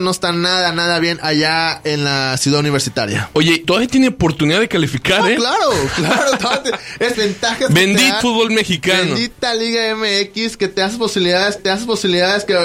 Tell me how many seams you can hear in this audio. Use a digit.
4